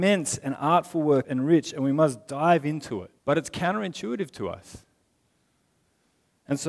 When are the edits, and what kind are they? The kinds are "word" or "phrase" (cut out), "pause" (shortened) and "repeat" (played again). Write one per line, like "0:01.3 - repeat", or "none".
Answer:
0:01.2 - phrase
0:03.2 - pause